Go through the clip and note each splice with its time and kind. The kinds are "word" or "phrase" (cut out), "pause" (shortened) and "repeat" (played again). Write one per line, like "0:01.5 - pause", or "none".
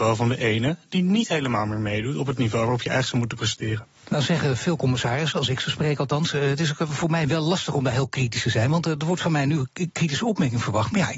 0:04.0 - pause